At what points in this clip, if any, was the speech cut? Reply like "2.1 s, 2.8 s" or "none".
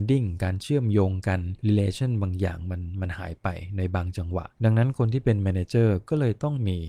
1.6 s, 4.5 s